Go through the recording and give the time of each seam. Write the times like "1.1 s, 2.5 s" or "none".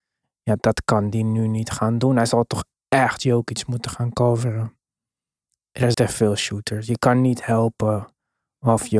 5.9 s

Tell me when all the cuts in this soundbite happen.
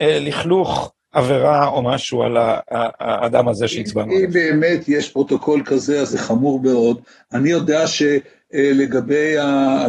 none

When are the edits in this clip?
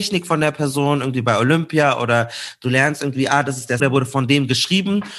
3.8 s

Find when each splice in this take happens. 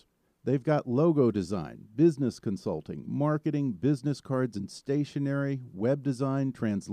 none

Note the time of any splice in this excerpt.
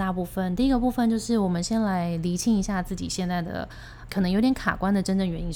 4.1 s

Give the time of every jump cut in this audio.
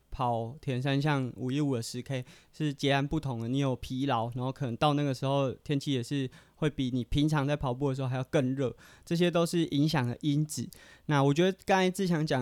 none

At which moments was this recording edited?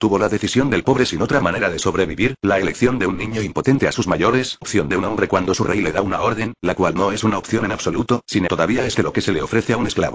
4.6 s, 8.5 s, 8.9 s

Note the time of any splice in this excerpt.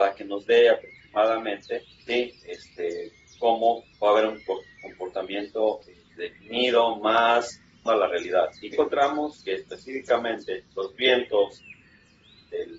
1.9 s, 3.9 s, 6.1 s, 7.9 s, 8.7 s, 10.7 s

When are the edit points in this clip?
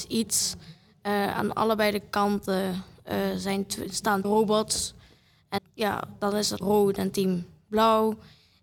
4.2 s, 5.6 s, 6.6 s

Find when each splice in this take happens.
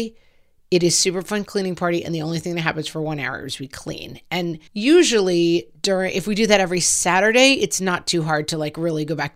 4.7 s

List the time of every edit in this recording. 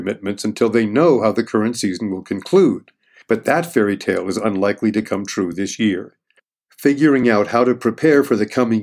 none

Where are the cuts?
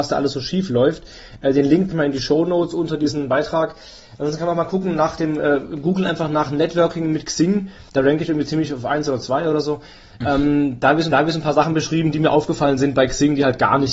1.9 s, 7.9 s, 11.1 s

